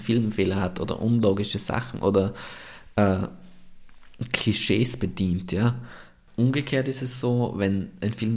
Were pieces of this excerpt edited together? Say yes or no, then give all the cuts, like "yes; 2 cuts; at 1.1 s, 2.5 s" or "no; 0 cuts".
no; 0 cuts